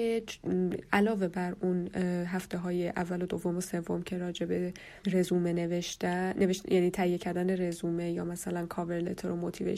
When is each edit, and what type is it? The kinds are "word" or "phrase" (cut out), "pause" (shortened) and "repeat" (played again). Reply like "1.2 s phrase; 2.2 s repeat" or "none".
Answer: 5.0 s pause